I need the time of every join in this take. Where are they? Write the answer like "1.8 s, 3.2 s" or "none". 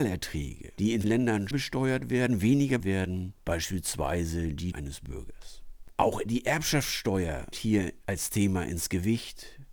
1.0 s, 1.5 s, 2.8 s, 3.4 s, 4.7 s, 7.5 s